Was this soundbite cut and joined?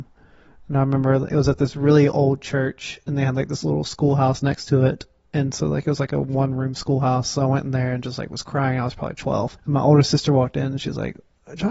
yes; 1 cut; at 9.6 s

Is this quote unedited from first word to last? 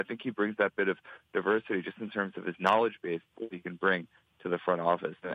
yes; 0 cuts

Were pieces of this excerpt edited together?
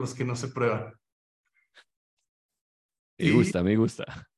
no; 0 cuts

